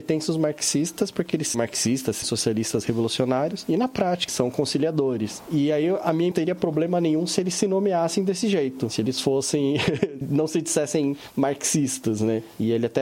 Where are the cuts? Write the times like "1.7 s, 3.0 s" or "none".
1.5 s, 2.2 s, 4.3 s, 6.3 s, 10.2 s